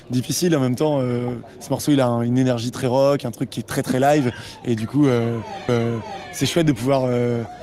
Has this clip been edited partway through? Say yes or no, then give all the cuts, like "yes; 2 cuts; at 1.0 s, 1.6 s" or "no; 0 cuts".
yes; 1 cut; at 5.7 s